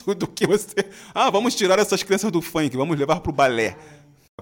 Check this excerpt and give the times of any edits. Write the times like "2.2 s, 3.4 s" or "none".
none